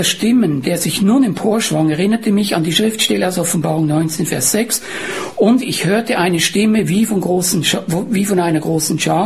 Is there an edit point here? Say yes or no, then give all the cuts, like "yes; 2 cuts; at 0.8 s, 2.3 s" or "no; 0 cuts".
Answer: no; 0 cuts